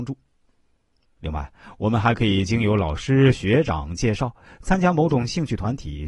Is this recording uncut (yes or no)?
yes